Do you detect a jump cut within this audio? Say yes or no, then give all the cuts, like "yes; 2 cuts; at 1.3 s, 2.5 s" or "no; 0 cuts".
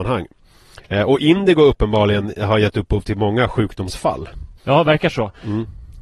yes; 1 cut; at 4.6 s